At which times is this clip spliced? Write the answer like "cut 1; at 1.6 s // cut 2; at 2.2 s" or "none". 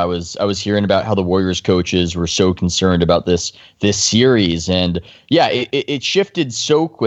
none